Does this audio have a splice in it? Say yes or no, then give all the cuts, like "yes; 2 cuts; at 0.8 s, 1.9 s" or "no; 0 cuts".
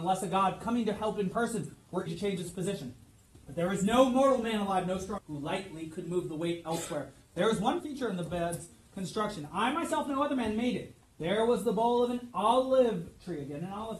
yes; 4 cuts; at 2.1 s, 3.4 s, 5.2 s, 7.8 s